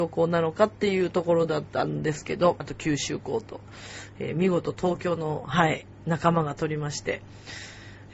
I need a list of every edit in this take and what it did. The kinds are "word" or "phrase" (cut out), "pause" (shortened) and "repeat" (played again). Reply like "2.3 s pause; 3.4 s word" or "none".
2.6 s word